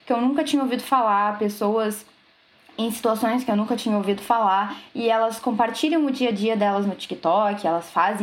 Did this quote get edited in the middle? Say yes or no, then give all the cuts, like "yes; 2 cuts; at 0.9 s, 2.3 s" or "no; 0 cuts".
no; 0 cuts